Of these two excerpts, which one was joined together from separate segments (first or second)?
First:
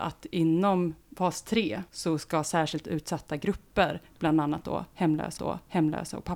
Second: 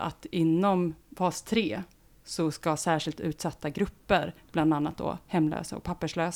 first